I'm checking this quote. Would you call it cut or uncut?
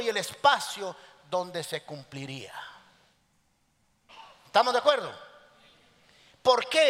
uncut